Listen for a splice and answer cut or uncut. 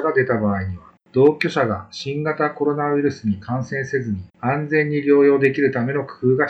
cut